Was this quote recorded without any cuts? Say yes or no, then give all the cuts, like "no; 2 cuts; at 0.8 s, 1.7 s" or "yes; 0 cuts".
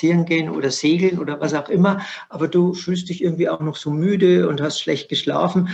yes; 0 cuts